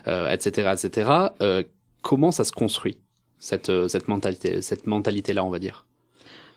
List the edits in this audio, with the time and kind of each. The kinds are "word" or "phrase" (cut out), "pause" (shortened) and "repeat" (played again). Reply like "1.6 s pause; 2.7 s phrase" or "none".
none